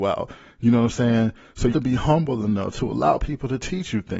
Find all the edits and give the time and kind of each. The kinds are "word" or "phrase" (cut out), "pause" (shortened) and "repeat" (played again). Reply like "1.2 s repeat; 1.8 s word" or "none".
1.7 s word